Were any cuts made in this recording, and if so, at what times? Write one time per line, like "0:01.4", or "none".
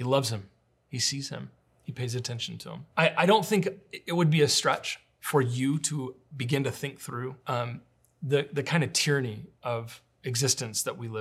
0:01.6
0:02.9
0:07.4